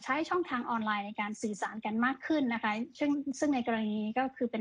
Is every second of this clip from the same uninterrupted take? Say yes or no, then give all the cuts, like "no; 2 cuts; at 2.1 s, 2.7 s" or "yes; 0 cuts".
yes; 0 cuts